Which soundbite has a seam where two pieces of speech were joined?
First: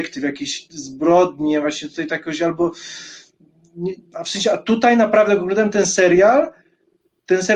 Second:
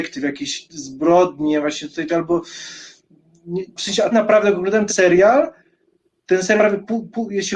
second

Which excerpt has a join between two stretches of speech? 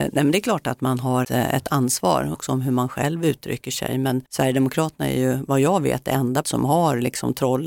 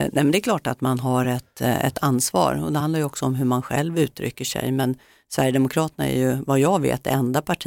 first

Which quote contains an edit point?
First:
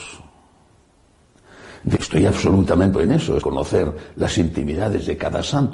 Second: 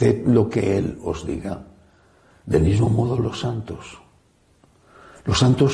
first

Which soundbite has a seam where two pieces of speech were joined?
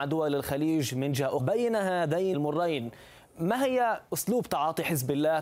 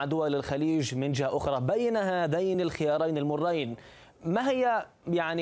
first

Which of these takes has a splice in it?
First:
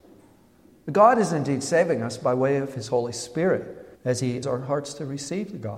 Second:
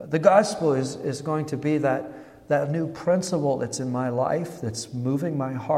first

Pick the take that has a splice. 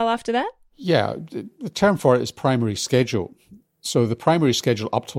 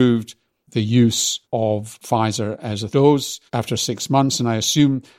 second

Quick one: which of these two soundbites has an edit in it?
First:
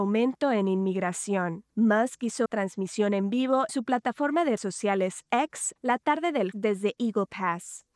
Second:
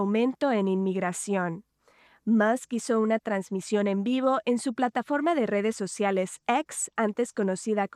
first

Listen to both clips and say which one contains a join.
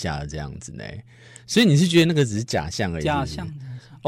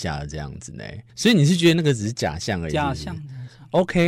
second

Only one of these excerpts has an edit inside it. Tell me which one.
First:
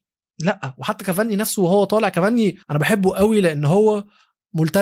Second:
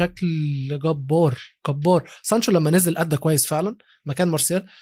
first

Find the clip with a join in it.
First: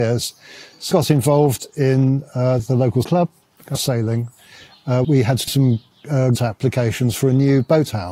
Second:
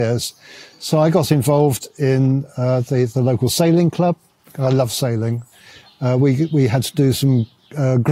first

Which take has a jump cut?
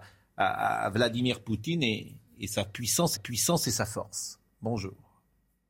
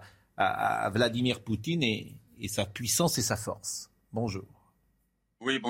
first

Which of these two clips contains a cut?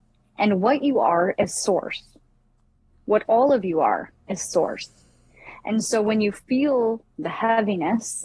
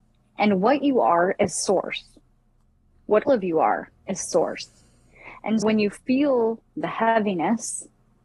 second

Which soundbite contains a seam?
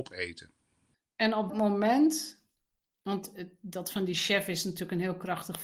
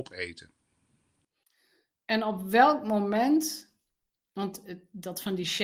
first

